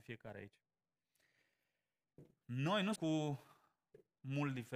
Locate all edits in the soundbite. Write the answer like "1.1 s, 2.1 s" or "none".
3.0 s